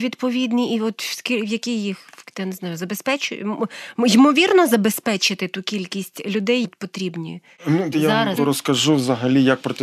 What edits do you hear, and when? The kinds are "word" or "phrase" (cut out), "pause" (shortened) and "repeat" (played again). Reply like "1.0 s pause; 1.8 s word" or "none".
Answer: 6.6 s word; 7.9 s word; 8.4 s word